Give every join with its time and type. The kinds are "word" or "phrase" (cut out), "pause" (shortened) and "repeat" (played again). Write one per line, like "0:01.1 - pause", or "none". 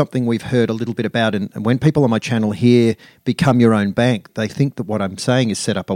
0:04.3 - word